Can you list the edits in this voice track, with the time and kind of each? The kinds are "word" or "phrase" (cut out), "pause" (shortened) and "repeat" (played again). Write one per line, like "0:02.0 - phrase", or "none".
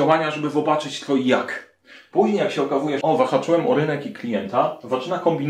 0:03.0 - word

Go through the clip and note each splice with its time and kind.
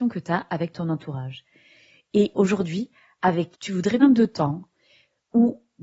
0:02.3 - word
0:03.5 - word
0:04.0 - phrase

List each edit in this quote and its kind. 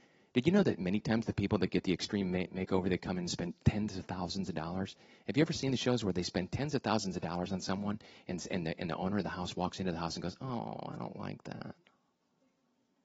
none

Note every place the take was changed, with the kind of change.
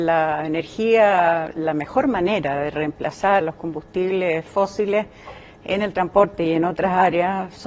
0:01.5 - word
0:03.4 - word

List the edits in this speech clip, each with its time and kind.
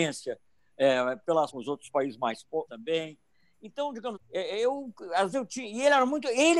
0:01.5 - word
0:02.7 - word
0:04.1 - word
0:05.3 - word

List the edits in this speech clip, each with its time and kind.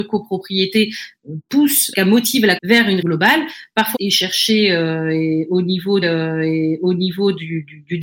0:01.9 - phrase
0:02.6 - word
0:03.0 - word
0:03.9 - word
0:06.0 - repeat

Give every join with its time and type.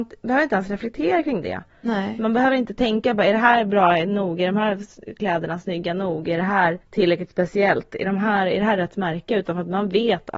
0:06.8 - pause

